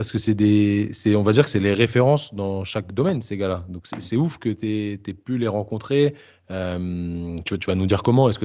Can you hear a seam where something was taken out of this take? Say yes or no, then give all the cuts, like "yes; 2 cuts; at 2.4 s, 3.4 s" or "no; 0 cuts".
no; 0 cuts